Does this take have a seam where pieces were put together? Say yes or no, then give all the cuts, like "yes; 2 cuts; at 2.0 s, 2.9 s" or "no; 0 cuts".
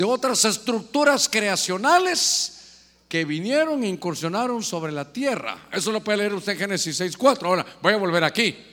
no; 0 cuts